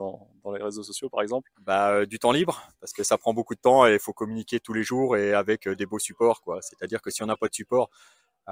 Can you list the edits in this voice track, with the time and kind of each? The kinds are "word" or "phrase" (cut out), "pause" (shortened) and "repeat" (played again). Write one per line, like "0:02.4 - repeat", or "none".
0:01.5 - pause